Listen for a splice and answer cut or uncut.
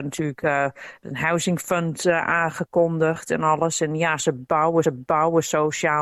cut